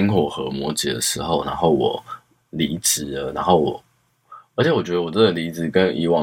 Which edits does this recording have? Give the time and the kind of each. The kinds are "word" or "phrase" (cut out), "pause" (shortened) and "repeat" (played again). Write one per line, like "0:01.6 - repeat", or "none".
none